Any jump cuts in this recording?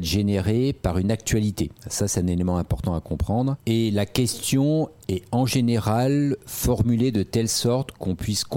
yes; 1 cut; at 1.8 s

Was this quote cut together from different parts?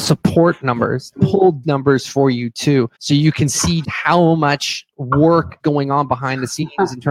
yes; 5 cuts; at 1.2 s, 1.6 s, 2.9 s, 3.8 s, 5.6 s

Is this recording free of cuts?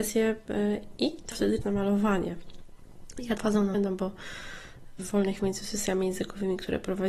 no; 6 cuts; at 1.3 s, 1.6 s, 3.4 s, 3.7 s, 5.0 s, 5.4 s

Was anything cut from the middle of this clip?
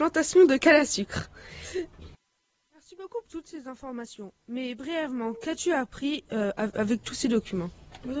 yes; 1 cut; at 3.2 s

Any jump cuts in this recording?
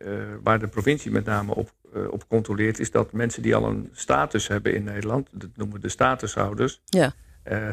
no; 0 cuts

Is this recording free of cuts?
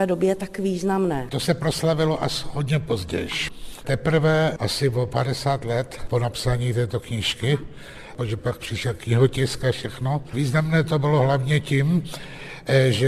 no; 1 cut; at 10.3 s

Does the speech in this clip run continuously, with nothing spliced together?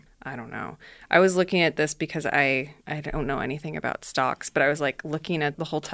no; 1 cut; at 2.8 s

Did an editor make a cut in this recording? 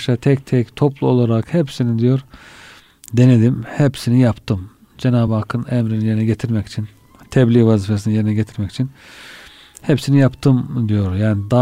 no; 0 cuts

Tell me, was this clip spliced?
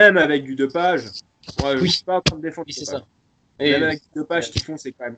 no; 0 cuts

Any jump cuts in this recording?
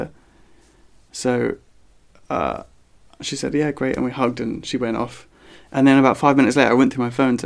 no; 0 cuts

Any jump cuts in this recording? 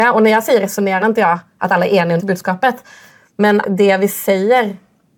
yes; 3 cuts; at 1.0 s, 2.2 s, 3.6 s

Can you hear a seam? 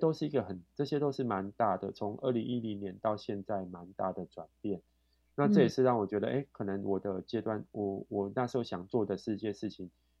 no; 0 cuts

